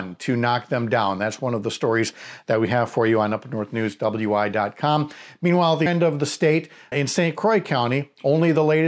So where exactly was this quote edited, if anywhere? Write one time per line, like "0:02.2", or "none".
0:05.9
0:06.9